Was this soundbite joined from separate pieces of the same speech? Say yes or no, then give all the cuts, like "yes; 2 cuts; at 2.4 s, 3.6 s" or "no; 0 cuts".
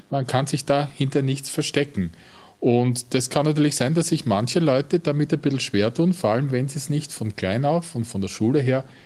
no; 0 cuts